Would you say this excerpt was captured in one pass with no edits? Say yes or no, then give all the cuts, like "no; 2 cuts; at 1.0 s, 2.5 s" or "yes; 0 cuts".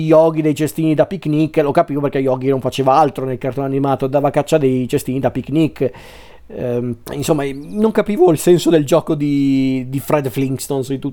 no; 1 cut; at 7.0 s